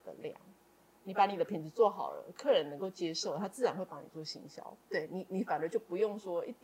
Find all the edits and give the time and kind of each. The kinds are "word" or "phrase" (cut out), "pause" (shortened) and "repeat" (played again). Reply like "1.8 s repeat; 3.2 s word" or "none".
4.9 s pause